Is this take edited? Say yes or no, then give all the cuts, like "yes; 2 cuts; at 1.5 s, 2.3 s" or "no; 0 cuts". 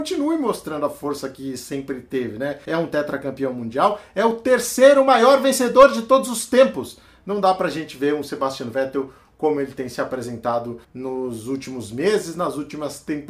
no; 0 cuts